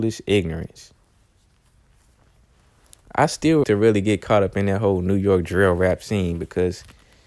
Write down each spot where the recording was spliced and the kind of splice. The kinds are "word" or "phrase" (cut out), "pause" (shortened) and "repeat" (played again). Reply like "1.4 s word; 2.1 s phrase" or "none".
3.6 s word